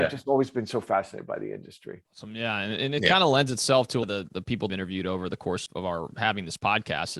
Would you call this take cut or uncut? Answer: cut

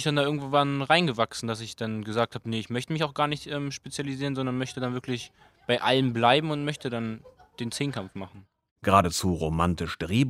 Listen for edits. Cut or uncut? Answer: uncut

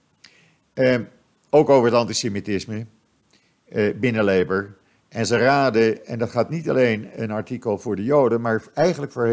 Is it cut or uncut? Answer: uncut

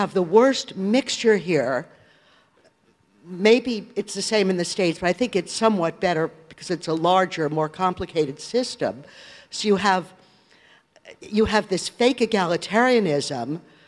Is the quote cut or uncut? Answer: uncut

